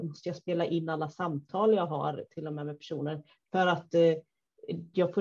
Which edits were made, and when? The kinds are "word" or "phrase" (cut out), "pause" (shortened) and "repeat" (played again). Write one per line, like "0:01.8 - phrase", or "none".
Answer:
none